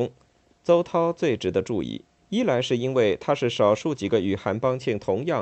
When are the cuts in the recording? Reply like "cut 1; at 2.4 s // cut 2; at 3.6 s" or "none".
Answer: cut 1; at 2.2 s